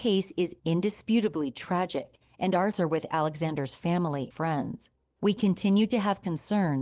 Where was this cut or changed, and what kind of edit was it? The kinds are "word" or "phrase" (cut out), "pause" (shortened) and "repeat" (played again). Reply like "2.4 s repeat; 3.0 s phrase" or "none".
2.7 s word; 4.3 s word